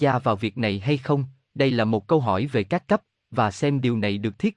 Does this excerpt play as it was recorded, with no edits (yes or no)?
yes